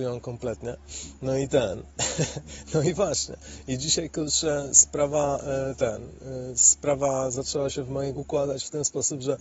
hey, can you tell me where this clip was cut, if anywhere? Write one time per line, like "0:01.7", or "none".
0:08.1